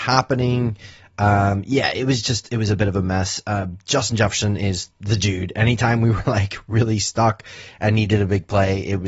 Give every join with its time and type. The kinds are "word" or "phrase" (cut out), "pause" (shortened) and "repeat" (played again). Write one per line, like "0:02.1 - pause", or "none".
0:04.9 - pause